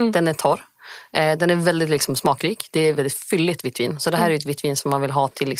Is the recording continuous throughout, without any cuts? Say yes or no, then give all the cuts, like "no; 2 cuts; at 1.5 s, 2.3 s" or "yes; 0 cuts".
no; 1 cut; at 3.0 s